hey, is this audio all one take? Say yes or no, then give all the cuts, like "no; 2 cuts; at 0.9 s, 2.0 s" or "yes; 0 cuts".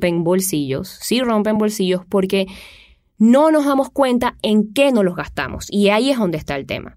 yes; 0 cuts